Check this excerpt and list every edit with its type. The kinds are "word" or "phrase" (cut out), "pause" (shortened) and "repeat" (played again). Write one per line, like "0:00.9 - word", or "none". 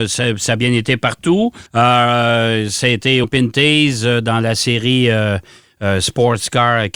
0:01.7 - pause
0:03.2 - word